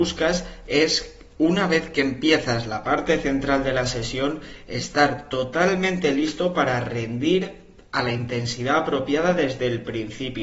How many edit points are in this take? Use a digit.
0